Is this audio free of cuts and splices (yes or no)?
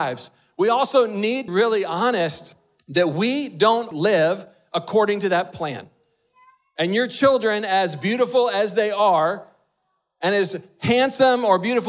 no